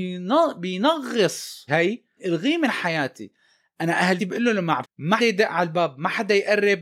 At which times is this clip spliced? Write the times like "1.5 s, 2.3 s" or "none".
1.7 s, 2.2 s, 4.2 s, 4.8 s, 5.2 s